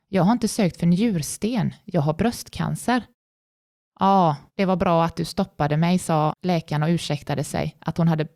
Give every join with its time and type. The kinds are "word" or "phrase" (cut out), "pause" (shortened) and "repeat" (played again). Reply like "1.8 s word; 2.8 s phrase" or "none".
4.5 s pause